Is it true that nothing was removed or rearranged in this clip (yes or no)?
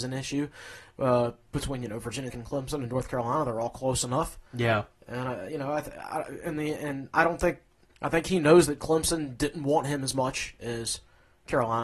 no